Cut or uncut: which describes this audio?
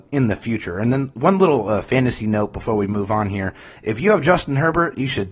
uncut